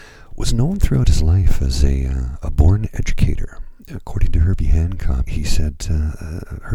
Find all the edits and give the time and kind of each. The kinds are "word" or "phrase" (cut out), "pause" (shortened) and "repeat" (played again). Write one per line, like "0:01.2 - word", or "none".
0:03.8 - pause
0:05.2 - word